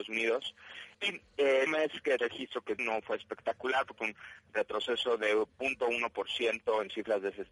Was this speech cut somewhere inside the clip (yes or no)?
yes